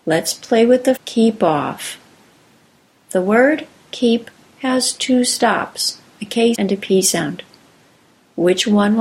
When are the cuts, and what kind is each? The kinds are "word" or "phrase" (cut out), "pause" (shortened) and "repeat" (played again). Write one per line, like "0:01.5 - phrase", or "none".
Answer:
0:01.0 - word
0:06.5 - word